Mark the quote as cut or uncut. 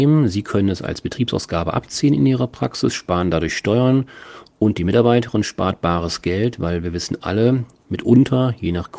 uncut